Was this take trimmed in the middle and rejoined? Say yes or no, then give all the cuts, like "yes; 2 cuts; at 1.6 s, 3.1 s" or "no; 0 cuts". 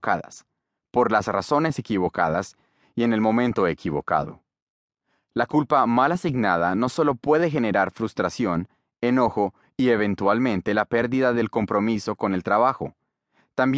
no; 0 cuts